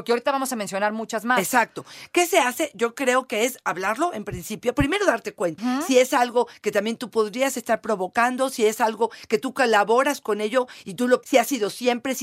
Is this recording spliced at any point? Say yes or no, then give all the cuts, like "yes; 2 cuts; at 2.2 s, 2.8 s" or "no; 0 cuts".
yes; 2 cuts; at 5.6 s, 11.2 s